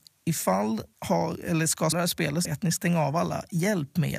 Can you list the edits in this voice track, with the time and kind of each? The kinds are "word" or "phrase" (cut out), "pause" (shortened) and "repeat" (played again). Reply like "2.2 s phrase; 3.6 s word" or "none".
0.9 s word; 1.9 s word; 2.4 s phrase